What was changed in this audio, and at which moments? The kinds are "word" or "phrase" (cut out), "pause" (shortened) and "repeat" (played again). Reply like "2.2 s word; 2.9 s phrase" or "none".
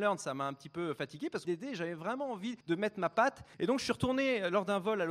1.4 s phrase; 2.6 s pause; 3.5 s pause